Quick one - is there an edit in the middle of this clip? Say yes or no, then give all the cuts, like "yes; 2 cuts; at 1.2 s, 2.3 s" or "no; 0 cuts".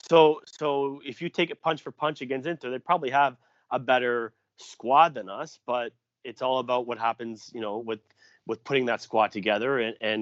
no; 0 cuts